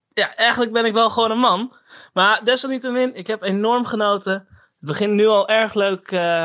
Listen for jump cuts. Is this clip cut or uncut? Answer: uncut